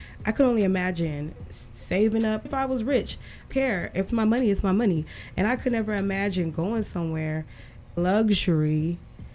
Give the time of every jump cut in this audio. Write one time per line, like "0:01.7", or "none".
0:02.5
0:03.5
0:04.1
0:08.0

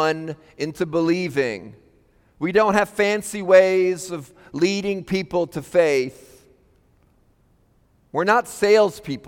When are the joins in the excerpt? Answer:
none

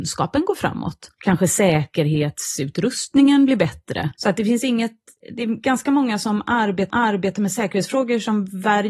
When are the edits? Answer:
0:01.1
0:04.2
0:06.9

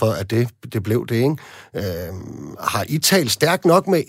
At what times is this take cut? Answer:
none

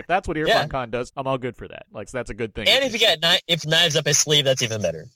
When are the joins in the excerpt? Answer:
0:01.1
0:02.1
0:03.6

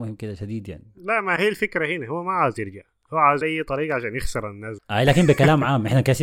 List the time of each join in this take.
0:03.4
0:04.8

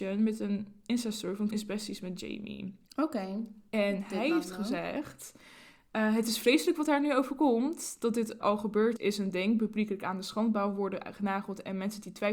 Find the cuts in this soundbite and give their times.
0:01.5
0:08.4
0:09.0

